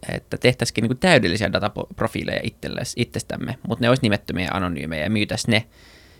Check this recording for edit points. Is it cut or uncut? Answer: uncut